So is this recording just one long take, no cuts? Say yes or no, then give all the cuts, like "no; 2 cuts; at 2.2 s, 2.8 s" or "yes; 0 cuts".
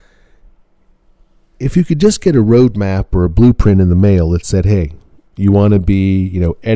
yes; 0 cuts